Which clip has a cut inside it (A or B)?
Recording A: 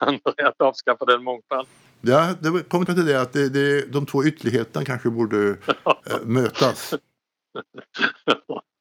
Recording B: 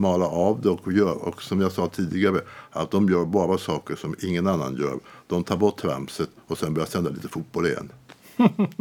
A